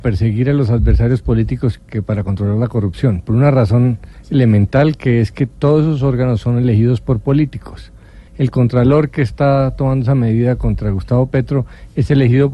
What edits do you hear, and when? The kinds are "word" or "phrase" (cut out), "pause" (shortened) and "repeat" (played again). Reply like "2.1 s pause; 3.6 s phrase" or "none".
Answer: 8.3 s pause

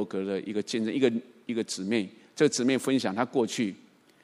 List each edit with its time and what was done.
none

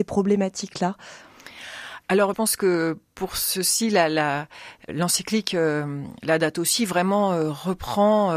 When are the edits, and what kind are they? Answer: 2.3 s phrase

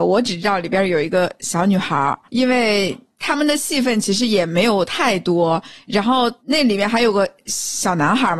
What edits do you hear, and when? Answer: 2.3 s pause; 6.4 s pause

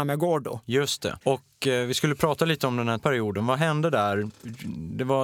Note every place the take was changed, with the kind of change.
1.2 s pause; 3.0 s word

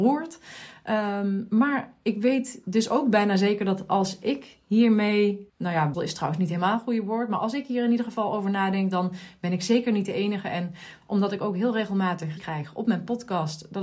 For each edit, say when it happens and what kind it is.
5.5 s pause; 5.9 s word; 12.4 s word

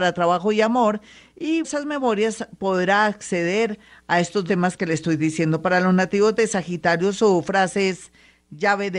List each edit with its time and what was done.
1.6 s word; 4.5 s word

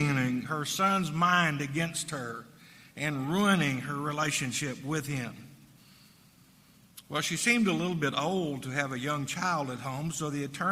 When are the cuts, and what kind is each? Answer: none

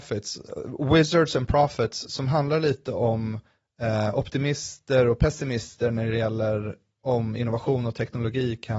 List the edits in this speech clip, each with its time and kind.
none

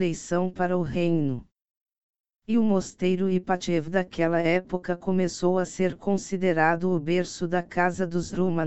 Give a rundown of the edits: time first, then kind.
none

